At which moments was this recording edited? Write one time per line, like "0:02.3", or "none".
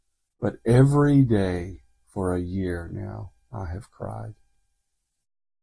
none